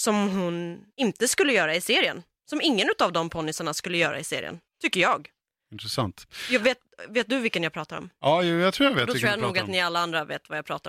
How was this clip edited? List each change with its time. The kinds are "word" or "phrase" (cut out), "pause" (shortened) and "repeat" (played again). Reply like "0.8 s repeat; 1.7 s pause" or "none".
0.9 s pause